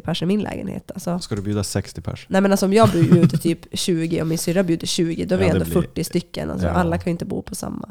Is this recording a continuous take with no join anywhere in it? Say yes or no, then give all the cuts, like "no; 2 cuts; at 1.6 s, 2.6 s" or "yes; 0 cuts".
yes; 0 cuts